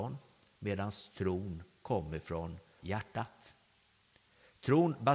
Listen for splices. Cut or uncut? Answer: cut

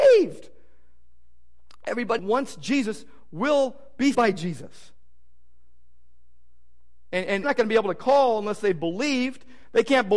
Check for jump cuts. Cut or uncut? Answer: cut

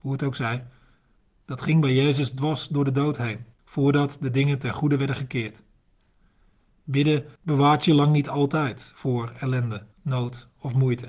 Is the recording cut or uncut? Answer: cut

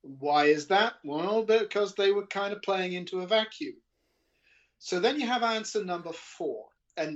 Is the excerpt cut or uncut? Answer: uncut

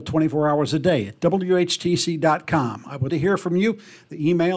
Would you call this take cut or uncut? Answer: cut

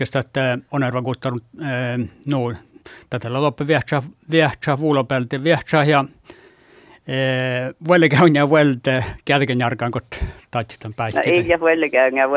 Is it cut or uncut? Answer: uncut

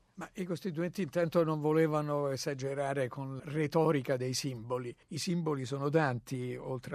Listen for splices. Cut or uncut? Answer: cut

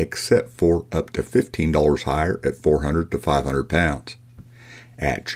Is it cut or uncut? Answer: uncut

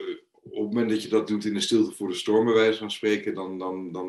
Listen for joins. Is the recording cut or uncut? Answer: uncut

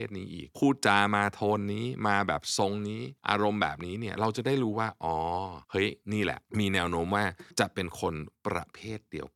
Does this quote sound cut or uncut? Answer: cut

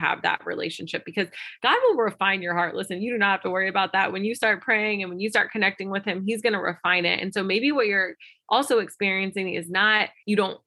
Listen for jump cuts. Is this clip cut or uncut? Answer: uncut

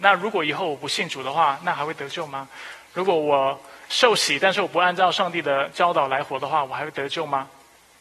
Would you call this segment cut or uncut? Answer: uncut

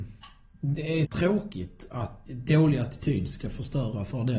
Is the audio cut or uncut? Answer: cut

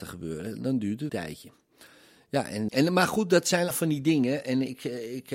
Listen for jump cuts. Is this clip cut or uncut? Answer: cut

